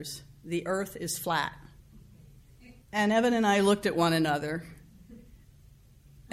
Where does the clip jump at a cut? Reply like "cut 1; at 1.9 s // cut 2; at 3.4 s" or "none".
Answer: cut 1; at 2.8 s